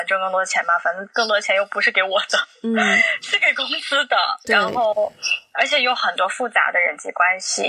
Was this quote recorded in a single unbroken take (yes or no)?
yes